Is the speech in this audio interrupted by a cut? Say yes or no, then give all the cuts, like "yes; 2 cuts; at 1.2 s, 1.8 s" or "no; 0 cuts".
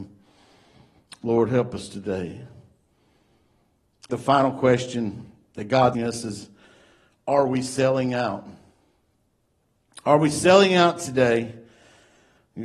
yes; 2 cuts; at 4.1 s, 5.9 s